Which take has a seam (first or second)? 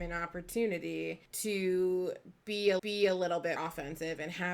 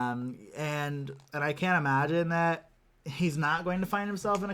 first